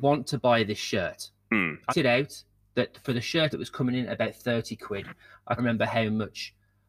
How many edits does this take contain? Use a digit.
3